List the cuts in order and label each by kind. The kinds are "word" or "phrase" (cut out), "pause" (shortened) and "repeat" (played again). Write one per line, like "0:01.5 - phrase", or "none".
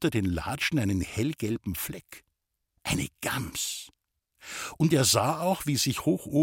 none